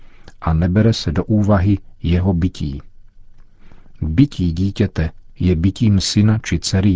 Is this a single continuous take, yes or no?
yes